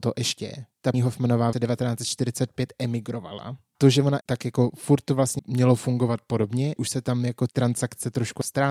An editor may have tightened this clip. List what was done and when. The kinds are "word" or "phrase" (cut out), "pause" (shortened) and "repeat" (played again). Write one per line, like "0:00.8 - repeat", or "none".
0:00.9 - word
0:01.5 - word
0:03.7 - word
0:04.2 - word
0:05.4 - word
0:06.8 - word
0:07.5 - word